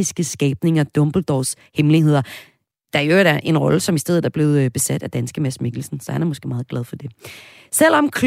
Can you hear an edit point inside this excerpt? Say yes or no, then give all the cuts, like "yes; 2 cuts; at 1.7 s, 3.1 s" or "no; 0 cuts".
no; 0 cuts